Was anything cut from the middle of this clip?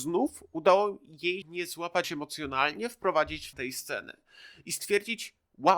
yes; 3 cuts; at 1.4 s, 2.0 s, 3.5 s

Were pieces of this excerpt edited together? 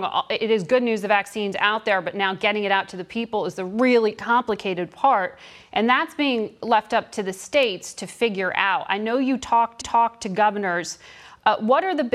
yes; 1 cut; at 9.8 s

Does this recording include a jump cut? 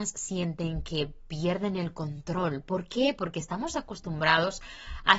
no; 0 cuts

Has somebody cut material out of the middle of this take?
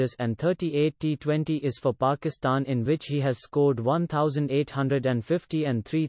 no; 0 cuts

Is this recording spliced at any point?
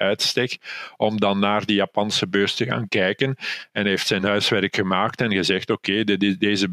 no; 0 cuts

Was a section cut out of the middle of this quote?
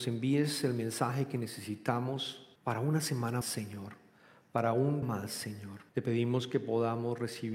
yes; 4 cuts; at 2.6 s, 3.4 s, 5.0 s, 5.9 s

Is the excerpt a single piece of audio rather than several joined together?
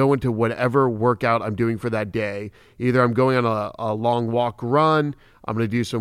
yes; 0 cuts

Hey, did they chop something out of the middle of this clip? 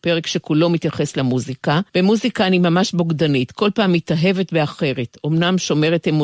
yes; 1 cut; at 1.9 s

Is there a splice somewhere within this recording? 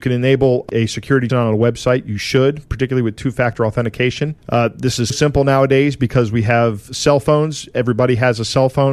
yes; 3 cuts; at 1.3 s, 4.4 s, 5.1 s

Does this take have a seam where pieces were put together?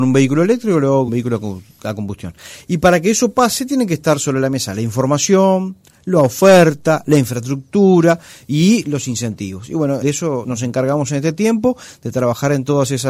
yes; 3 cuts; at 1.1 s, 10.0 s, 10.4 s

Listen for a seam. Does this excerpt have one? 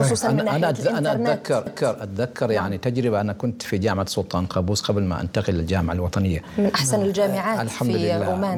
yes; 1 cut; at 1.7 s

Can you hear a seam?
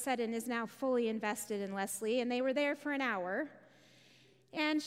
no; 0 cuts

